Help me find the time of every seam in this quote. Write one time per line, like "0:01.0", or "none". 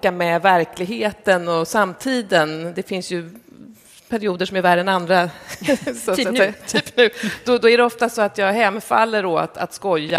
none